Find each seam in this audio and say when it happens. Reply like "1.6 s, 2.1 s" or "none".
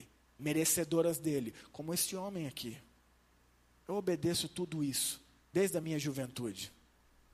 none